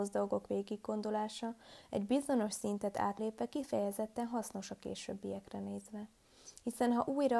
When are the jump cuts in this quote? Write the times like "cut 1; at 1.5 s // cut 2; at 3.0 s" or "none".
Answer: cut 1; at 3.2 s